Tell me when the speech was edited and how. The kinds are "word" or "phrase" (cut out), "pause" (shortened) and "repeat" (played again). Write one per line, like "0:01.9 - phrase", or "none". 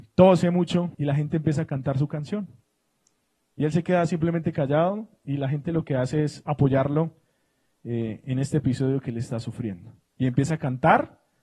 0:00.9 - pause